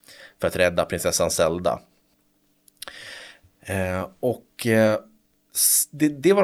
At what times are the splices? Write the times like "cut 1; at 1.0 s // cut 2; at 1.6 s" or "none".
none